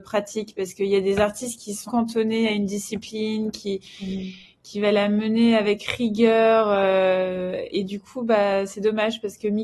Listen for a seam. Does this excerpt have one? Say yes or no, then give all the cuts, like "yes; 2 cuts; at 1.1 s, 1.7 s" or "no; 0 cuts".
yes; 2 cuts; at 1.9 s, 7.7 s